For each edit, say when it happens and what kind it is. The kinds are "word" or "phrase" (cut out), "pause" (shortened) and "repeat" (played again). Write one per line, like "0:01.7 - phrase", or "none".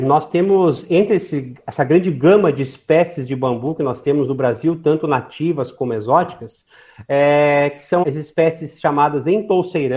0:08.0 - word